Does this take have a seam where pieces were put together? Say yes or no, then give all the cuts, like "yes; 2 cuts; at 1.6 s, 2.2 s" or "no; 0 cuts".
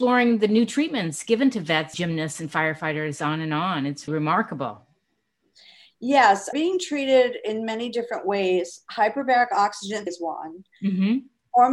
yes; 4 cuts; at 1.9 s, 4.1 s, 6.5 s, 10.1 s